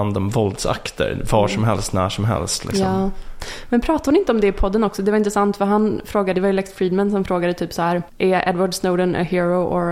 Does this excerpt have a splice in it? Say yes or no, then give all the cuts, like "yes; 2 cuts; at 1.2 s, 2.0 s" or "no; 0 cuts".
yes; 1 cut; at 6.3 s